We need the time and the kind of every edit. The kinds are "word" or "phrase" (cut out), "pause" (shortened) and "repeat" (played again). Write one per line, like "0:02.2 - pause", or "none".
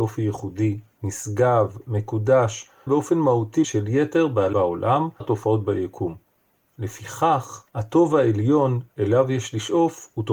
0:02.9 - word
0:03.6 - word
0:04.5 - word
0:05.2 - word
0:07.7 - pause